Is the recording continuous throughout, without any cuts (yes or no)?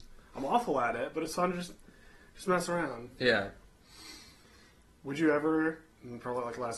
yes